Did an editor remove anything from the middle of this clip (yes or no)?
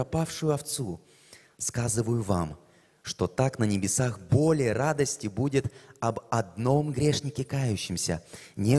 no